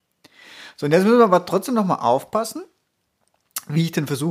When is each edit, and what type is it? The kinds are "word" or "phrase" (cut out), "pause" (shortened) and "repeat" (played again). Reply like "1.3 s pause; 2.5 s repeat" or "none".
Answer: none